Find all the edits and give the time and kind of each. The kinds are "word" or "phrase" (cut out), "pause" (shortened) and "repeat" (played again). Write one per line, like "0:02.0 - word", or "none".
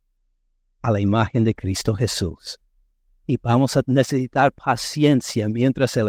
none